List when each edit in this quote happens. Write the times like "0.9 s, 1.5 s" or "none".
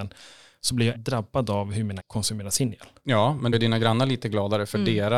0.9 s, 2.0 s, 3.5 s